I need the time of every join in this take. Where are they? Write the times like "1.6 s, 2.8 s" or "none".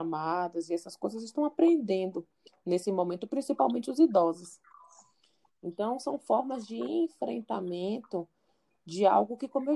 none